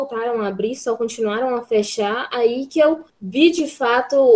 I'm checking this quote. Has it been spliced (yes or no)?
yes